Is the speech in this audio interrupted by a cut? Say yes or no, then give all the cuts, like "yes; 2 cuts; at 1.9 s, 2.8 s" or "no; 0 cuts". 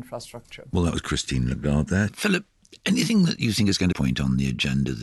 yes; 1 cut; at 3.9 s